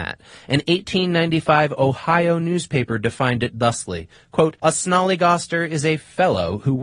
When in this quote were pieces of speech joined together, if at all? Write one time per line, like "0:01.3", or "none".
0:04.6